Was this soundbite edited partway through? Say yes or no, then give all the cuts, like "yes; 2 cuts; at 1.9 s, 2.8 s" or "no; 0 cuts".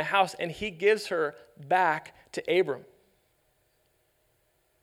no; 0 cuts